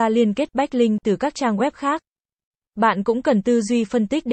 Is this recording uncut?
yes; 0 cuts

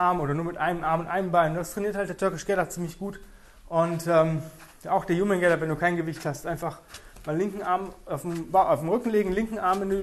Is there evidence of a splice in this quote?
no; 0 cuts

